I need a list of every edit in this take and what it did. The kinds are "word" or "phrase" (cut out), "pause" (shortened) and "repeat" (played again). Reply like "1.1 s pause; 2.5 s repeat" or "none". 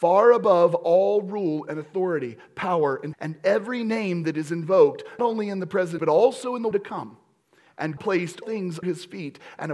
3.1 s word; 5.2 s word; 6.0 s word; 6.7 s word; 8.0 s word; 8.4 s word; 8.8 s word